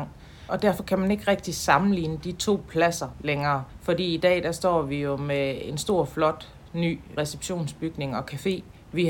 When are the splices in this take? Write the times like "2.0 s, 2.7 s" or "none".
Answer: none